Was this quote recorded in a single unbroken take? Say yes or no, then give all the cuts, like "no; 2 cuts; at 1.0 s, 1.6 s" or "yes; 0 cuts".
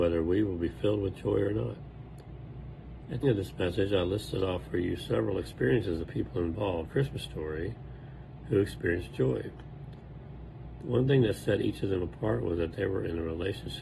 no; 2 cuts; at 3.2 s, 6.8 s